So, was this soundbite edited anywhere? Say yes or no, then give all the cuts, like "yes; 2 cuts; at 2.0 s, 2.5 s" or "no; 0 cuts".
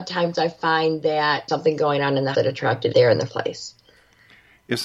yes; 4 cuts; at 1.5 s, 2.3 s, 2.9 s, 3.3 s